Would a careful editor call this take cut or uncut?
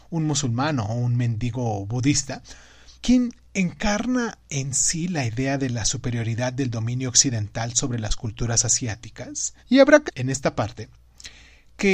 cut